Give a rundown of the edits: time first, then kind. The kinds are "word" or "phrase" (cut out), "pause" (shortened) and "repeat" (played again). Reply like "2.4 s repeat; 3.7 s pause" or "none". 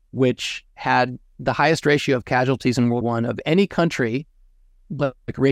3.0 s word